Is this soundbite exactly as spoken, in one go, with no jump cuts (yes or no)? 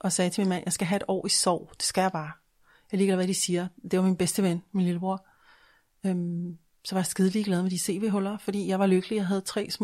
yes